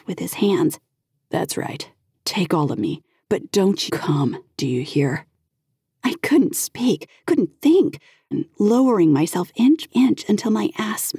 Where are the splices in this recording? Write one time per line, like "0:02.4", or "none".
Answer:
0:03.9
0:08.3
0:09.9